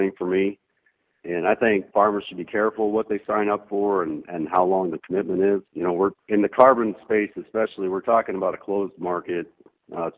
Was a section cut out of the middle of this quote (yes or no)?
yes